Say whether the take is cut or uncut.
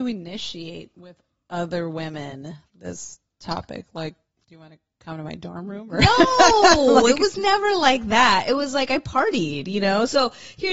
uncut